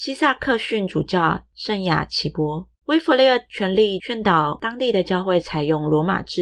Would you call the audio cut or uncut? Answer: cut